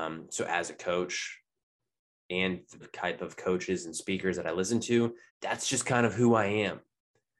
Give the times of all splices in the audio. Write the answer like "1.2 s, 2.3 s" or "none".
2.8 s, 5.3 s